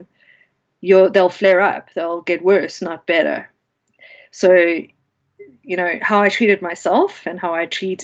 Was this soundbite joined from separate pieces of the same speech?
no; 0 cuts

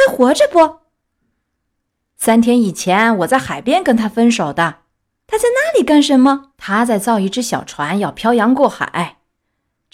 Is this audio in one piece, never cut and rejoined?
no; 2 cuts; at 5.0 s, 6.5 s

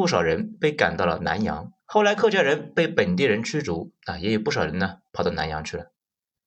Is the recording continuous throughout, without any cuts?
no; 1 cut; at 1.8 s

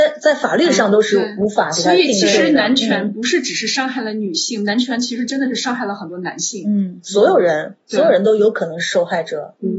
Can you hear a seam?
no; 0 cuts

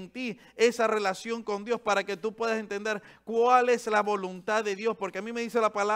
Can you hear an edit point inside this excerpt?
no; 0 cuts

